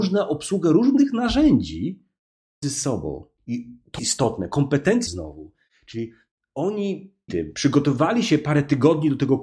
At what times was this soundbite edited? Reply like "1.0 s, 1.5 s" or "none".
2.6 s, 4.0 s, 5.1 s, 7.3 s